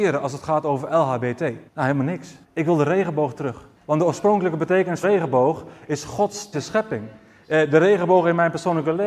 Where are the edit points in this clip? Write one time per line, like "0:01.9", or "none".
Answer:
0:01.7
0:02.4
0:03.8
0:05.0
0:06.5